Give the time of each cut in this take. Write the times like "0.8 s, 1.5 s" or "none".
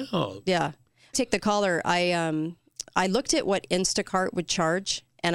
1.1 s